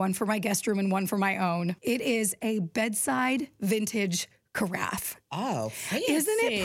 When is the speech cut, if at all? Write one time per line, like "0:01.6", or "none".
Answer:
0:01.8
0:05.2